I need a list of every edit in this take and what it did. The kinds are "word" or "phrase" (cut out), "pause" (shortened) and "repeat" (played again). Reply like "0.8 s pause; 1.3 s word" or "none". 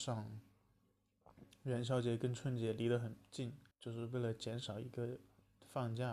3.7 s pause